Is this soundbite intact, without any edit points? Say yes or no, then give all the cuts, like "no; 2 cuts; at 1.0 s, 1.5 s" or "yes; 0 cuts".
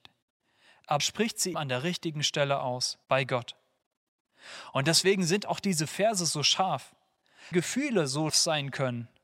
no; 5 cuts; at 1.0 s, 1.5 s, 3.0 s, 7.5 s, 8.3 s